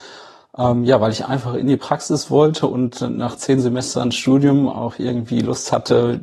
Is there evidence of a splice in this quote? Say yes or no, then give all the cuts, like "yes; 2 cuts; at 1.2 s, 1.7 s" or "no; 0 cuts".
no; 0 cuts